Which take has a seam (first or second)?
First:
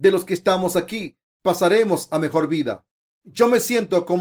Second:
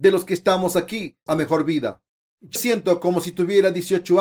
second